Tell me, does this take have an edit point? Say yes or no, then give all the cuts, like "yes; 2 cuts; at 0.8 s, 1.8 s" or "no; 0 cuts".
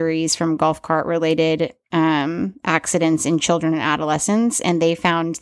no; 0 cuts